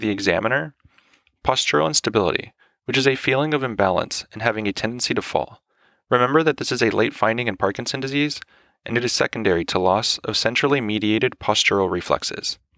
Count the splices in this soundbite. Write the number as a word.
zero